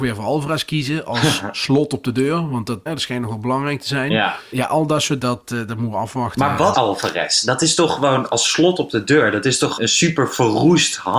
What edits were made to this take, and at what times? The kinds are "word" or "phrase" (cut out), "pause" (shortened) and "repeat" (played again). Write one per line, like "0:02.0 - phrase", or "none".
0:02.9 - word
0:04.5 - word
0:05.2 - word
0:06.7 - word
0:09.8 - word

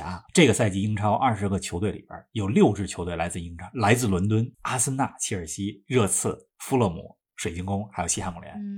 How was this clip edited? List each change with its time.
0:04.5 - pause

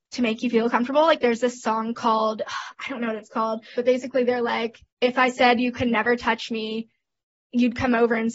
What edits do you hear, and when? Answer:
0:04.9 - pause

